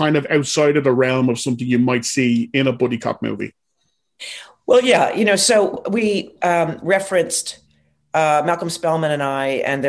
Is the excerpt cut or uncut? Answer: uncut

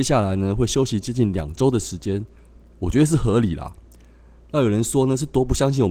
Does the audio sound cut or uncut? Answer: uncut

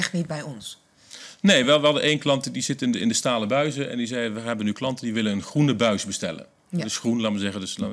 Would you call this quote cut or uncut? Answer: uncut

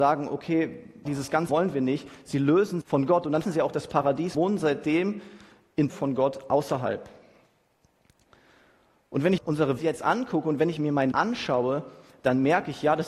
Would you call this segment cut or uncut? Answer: cut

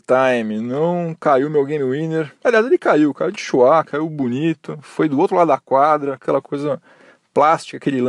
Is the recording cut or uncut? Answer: uncut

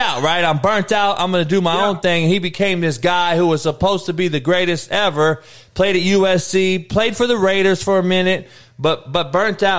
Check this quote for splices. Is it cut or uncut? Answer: uncut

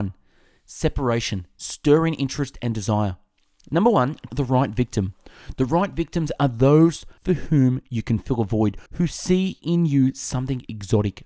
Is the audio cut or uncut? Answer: cut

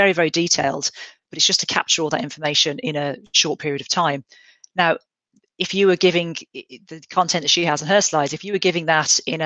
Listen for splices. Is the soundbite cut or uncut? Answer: uncut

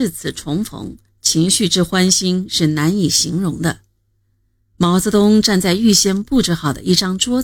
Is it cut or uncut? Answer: uncut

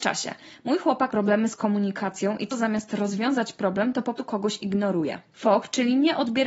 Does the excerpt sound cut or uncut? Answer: cut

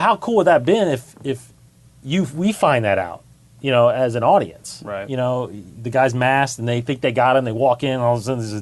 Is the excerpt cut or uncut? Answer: uncut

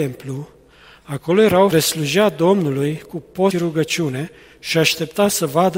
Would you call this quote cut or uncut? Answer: cut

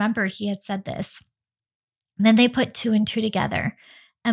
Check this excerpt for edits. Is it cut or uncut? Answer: uncut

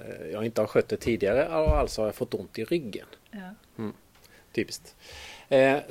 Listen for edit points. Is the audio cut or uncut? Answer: uncut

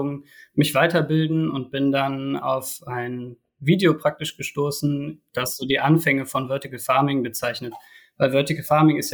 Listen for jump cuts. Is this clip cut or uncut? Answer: uncut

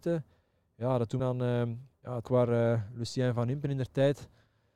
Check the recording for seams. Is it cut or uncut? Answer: cut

